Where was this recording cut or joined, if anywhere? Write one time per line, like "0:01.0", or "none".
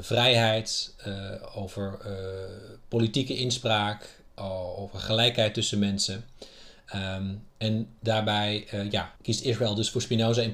0:09.2